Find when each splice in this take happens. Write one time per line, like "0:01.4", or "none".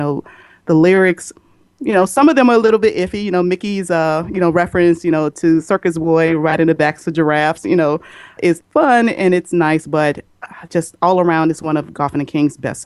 none

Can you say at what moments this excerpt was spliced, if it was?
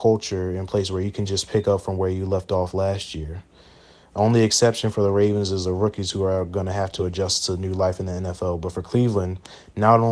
none

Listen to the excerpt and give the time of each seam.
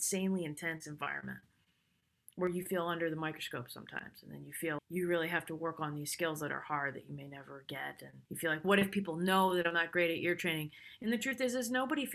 0:04.8
0:08.3

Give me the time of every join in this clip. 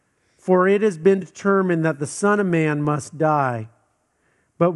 none

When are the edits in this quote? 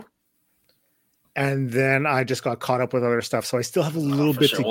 none

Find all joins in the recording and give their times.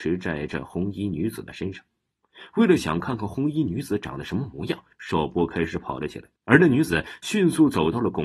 0:04.9
0:06.4

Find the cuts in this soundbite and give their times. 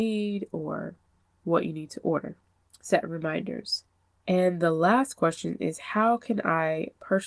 none

